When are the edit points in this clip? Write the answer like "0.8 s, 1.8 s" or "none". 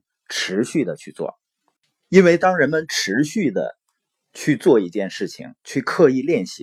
none